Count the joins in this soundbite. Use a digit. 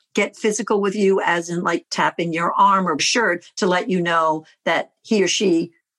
2